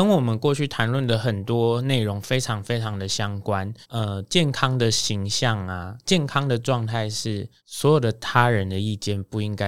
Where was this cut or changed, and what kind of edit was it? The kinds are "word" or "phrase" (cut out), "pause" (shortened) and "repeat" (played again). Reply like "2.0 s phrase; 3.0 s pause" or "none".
3.8 s pause; 7.6 s pause